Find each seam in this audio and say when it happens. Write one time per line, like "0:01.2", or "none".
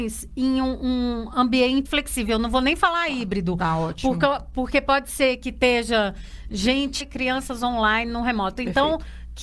0:01.9
0:07.0